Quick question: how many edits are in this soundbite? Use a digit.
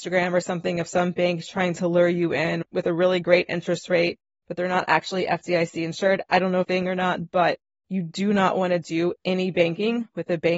1